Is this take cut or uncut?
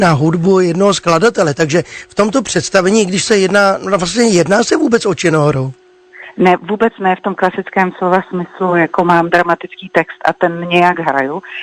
uncut